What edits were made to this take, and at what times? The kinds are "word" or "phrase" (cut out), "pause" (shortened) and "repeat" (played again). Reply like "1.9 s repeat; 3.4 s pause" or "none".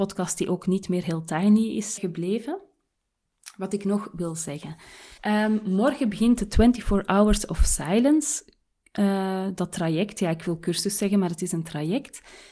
2.0 s word; 5.2 s pause